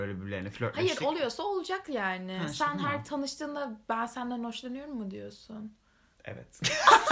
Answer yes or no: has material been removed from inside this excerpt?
no